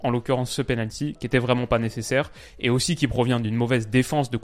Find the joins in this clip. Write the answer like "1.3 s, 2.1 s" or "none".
none